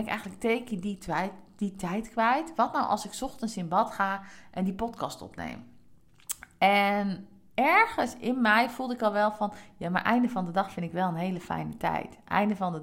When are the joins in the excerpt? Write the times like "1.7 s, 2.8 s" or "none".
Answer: 7.5 s